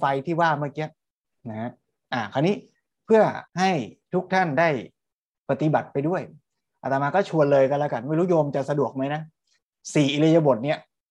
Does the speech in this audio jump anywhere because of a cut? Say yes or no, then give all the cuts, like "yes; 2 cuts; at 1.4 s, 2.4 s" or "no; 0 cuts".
yes; 1 cut; at 3.5 s